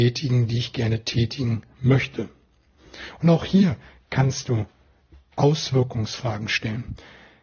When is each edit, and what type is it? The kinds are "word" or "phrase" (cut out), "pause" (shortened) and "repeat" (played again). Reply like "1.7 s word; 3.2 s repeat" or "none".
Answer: none